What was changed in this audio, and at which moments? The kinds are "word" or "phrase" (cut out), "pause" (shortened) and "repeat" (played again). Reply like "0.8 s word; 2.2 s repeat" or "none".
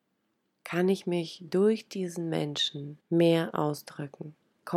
3.0 s pause